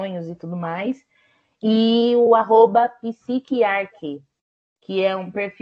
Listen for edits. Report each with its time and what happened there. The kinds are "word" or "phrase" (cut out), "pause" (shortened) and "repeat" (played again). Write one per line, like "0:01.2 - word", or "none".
none